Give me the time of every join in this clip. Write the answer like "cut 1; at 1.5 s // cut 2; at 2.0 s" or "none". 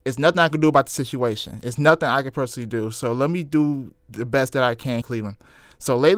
cut 1; at 5.0 s